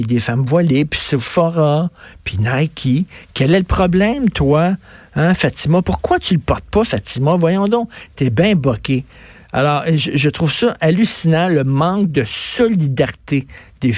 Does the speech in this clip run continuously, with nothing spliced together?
yes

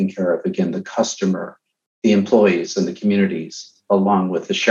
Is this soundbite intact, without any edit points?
yes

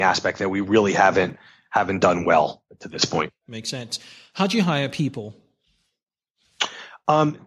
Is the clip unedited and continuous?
yes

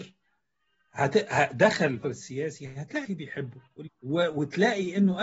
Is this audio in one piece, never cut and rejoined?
no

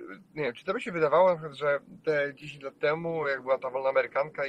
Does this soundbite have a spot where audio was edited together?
no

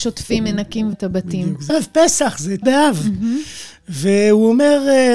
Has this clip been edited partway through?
yes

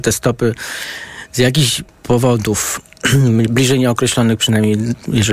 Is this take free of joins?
no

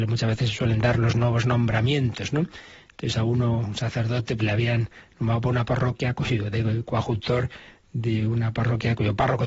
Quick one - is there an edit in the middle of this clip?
yes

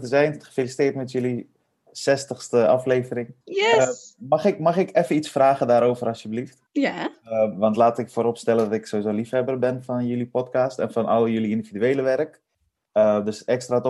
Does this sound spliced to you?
yes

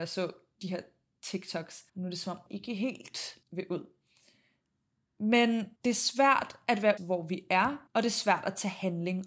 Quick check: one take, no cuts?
no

